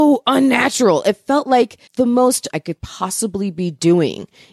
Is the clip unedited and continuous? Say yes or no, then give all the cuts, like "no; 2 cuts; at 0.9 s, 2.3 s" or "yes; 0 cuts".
no; 2 cuts; at 1.9 s, 2.5 s